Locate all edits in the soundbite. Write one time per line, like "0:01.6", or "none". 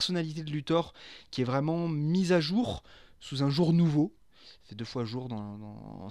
none